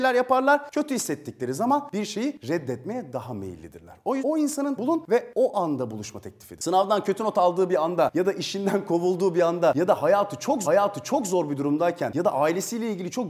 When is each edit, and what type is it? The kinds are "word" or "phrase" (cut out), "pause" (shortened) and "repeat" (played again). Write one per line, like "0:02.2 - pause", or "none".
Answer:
0:04.2 - word
0:04.8 - phrase
0:10.6 - repeat